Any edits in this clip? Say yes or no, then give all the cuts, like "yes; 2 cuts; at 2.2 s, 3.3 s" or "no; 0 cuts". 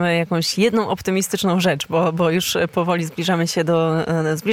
no; 0 cuts